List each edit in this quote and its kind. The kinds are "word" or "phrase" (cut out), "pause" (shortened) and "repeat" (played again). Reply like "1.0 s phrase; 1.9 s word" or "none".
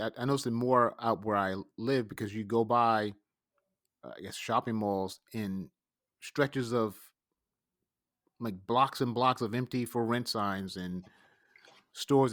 none